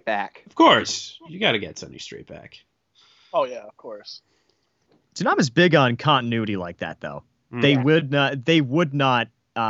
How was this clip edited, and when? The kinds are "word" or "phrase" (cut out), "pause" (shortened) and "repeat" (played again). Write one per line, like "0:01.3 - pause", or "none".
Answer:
none